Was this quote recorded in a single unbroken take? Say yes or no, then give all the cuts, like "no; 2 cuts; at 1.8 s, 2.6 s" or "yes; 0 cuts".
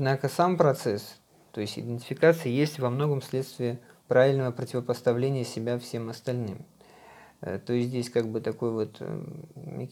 yes; 0 cuts